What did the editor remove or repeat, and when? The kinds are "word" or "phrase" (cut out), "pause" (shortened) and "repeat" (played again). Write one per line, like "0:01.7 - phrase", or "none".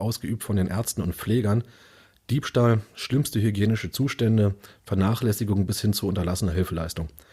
none

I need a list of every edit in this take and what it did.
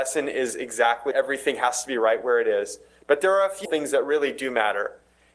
0:01.1 - word
0:03.6 - word

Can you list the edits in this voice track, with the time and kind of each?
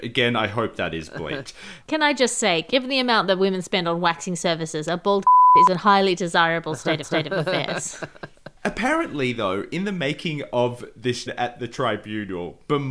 0:07.0 - repeat
0:11.3 - phrase

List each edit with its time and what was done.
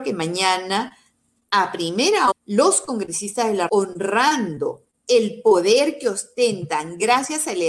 0:02.3 - word
0:03.7 - word

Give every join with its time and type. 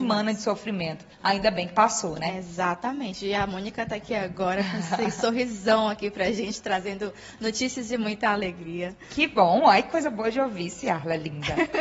0:01.1 - pause

